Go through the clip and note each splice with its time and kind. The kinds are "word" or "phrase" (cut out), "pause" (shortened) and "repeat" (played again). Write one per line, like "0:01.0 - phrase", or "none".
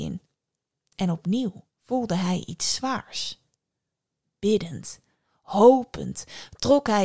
0:01.7 - pause